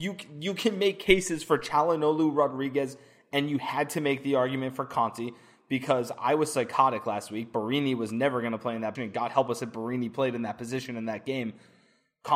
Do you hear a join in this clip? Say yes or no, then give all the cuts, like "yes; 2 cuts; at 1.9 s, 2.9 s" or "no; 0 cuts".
yes; 1 cut; at 9.0 s